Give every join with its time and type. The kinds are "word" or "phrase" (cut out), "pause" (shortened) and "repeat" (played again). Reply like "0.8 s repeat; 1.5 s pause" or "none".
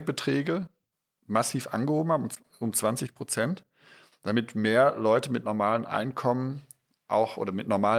none